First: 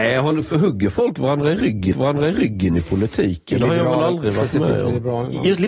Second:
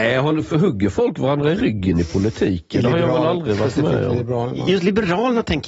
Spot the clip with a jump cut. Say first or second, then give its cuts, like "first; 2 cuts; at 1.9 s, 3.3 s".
first; 1 cut; at 1.9 s